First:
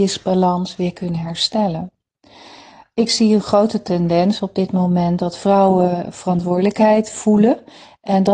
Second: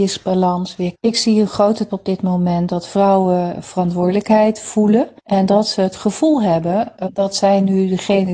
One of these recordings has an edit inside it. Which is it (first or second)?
second